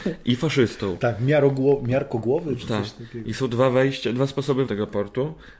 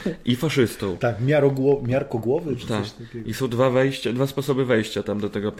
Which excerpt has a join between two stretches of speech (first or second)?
first